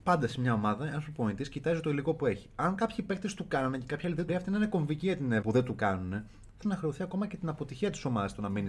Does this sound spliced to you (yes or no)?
yes